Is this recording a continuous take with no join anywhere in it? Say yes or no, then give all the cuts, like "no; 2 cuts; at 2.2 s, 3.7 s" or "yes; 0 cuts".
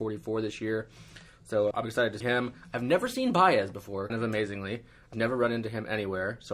no; 4 cuts; at 1.7 s, 2.2 s, 4.1 s, 5.1 s